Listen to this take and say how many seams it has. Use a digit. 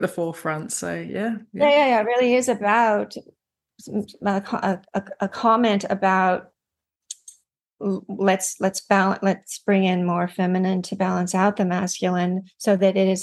0